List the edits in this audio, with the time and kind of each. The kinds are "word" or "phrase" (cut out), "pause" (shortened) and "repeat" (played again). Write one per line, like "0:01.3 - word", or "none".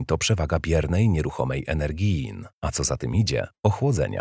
0:02.5 - pause